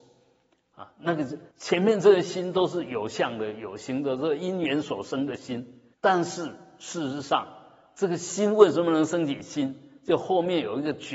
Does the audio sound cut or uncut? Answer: cut